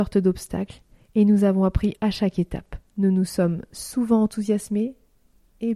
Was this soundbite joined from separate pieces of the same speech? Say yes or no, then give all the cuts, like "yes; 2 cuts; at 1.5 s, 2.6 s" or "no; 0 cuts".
yes; 2 cuts; at 2.0 s, 2.9 s